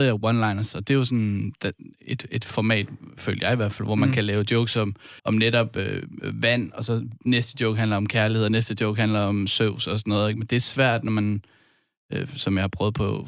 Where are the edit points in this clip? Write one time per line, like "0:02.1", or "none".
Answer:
0:05.2